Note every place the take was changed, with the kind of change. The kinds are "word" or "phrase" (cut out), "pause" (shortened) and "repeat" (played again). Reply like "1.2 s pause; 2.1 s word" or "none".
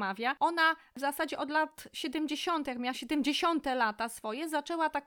none